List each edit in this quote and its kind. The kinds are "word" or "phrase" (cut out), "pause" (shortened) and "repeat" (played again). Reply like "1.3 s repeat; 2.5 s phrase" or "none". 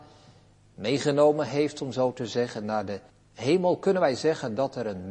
3.1 s pause

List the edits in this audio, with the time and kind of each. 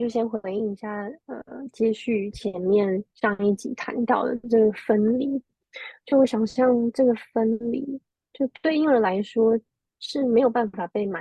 3.1 s pause

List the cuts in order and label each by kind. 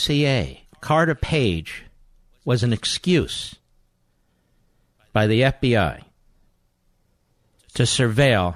none

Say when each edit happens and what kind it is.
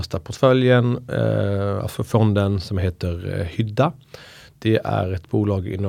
none

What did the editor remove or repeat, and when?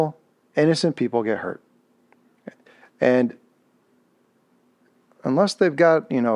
none

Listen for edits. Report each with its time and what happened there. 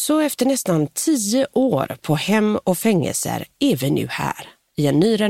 none

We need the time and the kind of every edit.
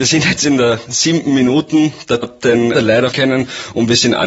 2.2 s word; 2.7 s word; 3.1 s word

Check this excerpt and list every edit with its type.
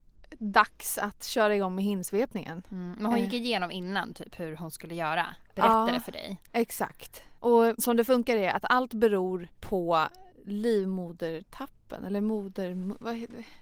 5.4 s pause; 7.4 s pause; 11.5 s pause

